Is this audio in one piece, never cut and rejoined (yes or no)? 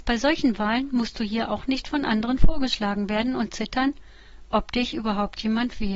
yes